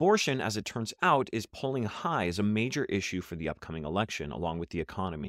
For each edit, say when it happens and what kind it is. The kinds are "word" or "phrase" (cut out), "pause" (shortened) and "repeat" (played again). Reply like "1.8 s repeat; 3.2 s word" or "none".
none